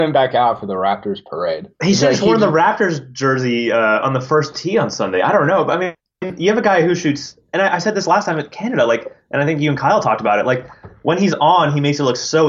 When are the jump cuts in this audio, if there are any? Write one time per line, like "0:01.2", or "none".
0:06.0

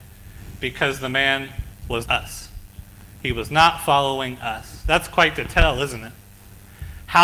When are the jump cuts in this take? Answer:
0:02.1

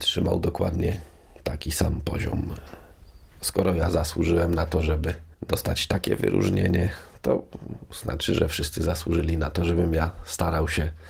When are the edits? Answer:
0:05.3

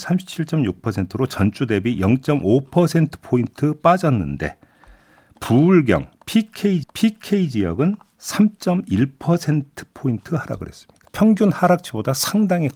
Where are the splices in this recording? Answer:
0:06.8
0:11.1

